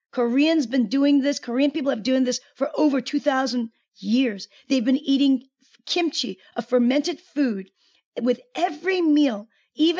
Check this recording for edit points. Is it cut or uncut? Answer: uncut